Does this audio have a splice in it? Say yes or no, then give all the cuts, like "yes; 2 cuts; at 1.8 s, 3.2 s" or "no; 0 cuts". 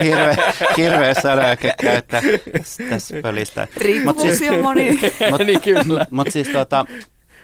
no; 0 cuts